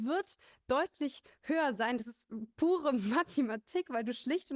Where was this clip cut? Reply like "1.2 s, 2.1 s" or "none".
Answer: none